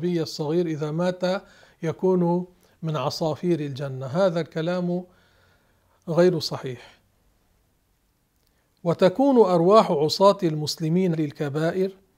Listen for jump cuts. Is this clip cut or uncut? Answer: cut